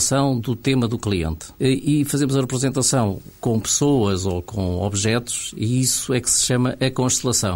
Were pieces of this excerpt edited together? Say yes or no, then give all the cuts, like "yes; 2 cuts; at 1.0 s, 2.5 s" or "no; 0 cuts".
yes; 1 cut; at 1.5 s